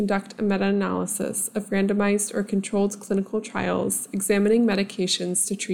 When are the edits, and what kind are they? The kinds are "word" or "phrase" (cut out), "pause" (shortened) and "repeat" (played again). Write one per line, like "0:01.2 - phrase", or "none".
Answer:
none